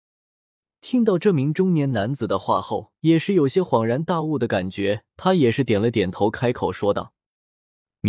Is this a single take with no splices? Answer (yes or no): no